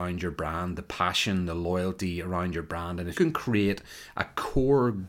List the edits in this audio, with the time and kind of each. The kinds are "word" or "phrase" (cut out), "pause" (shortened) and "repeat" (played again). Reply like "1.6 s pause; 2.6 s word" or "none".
3.1 s word